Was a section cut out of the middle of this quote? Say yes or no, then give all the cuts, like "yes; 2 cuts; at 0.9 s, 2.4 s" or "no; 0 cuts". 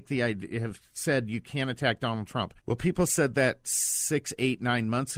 yes; 1 cut; at 2.6 s